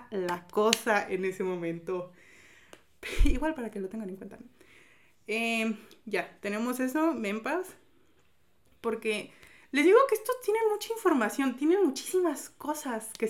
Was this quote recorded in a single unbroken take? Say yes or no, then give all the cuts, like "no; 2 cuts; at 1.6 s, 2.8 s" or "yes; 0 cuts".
yes; 0 cuts